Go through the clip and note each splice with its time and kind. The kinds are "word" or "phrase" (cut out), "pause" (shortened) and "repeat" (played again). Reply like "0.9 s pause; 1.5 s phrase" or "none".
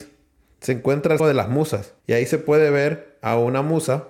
1.2 s word; 2.0 s pause